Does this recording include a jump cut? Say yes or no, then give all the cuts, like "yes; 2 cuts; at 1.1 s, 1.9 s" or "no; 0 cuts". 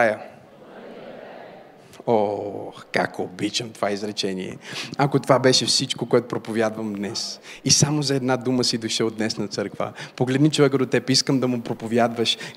no; 0 cuts